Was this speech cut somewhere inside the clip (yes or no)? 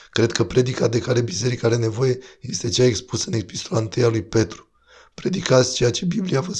no